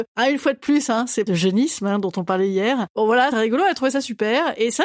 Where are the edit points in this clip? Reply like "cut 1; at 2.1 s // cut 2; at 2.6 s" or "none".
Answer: cut 1; at 1.3 s // cut 2; at 3.3 s